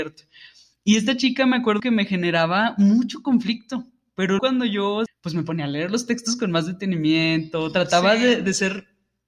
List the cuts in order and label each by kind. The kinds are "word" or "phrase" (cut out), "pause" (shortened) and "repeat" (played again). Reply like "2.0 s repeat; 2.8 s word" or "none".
1.8 s word; 4.4 s word; 5.1 s word